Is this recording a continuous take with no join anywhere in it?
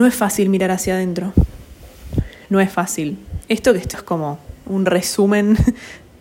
no; 2 cuts; at 3.4 s, 3.9 s

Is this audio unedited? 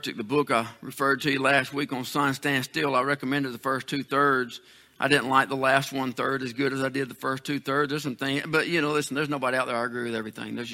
yes; 0 cuts

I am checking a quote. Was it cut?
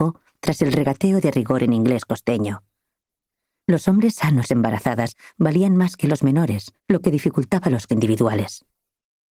yes; 3 cuts; at 4.5 s, 6.8 s, 7.9 s

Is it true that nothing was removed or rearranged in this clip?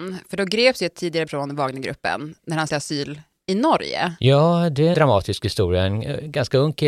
no; 3 cuts; at 1.3 s, 2.7 s, 4.9 s

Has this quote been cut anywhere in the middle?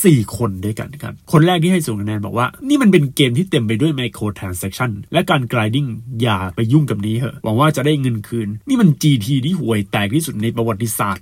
no; 0 cuts

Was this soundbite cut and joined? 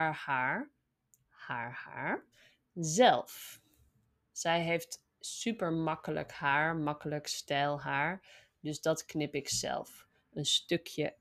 no; 0 cuts

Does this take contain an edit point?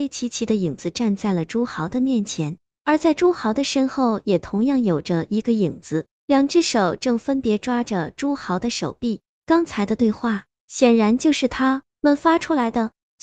yes; 1 cut; at 11.9 s

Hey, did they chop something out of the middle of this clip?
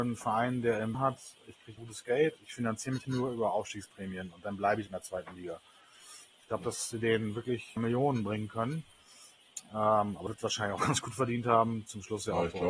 yes; 9 cuts; at 0.9 s, 1.8 s, 2.4 s, 3.0 s, 4.9 s, 6.9 s, 7.8 s, 10.3 s, 10.8 s

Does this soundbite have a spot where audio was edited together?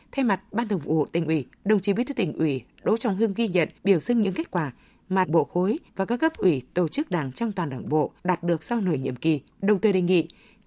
yes; 6 cuts; at 1.5 s, 3.8 s, 5.2 s, 5.9 s, 8.2 s, 9.5 s

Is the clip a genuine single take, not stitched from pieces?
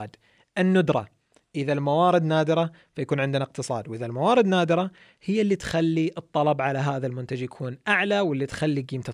yes; 0 cuts

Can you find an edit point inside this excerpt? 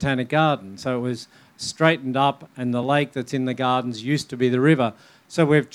no; 0 cuts

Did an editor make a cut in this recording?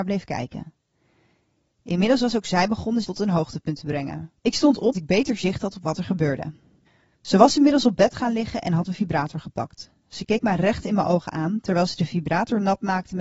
yes; 3 cuts; at 3.0 s, 4.4 s, 4.9 s

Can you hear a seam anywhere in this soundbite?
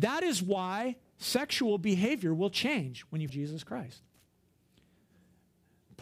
yes; 1 cut; at 3.3 s

